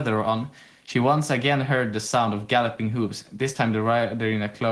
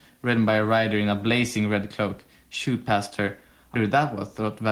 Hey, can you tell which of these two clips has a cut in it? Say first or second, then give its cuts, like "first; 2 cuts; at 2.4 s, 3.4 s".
second; 1 cut; at 3.8 s